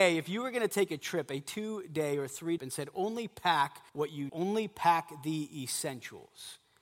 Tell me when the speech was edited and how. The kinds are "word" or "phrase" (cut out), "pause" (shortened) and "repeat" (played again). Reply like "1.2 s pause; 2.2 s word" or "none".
2.6 s phrase; 3.9 s pause; 4.3 s word